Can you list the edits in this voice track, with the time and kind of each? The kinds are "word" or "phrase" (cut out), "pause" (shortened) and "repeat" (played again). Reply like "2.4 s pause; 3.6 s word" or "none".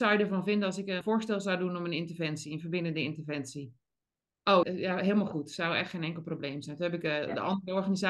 1.0 s word; 4.6 s word